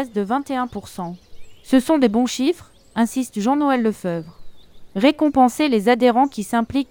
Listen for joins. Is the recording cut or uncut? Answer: uncut